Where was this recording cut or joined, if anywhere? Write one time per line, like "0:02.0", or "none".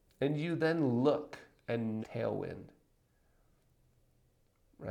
0:02.0